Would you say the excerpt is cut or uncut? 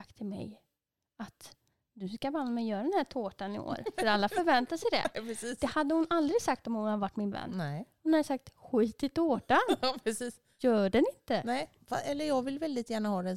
cut